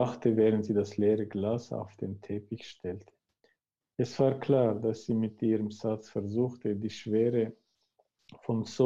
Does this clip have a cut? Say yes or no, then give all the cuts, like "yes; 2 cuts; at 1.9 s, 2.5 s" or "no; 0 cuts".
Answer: no; 0 cuts